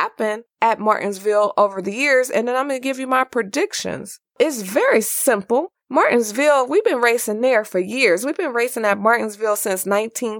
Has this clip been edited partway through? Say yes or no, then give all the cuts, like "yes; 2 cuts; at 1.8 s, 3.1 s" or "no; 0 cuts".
no; 0 cuts